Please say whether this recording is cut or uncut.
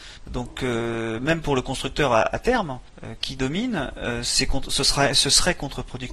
uncut